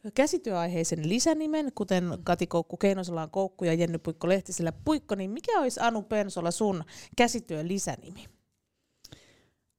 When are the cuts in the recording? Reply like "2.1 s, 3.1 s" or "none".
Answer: none